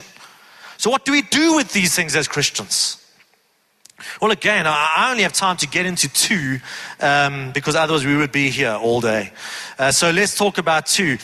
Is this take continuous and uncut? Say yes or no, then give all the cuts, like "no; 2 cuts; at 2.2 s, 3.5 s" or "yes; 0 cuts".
yes; 0 cuts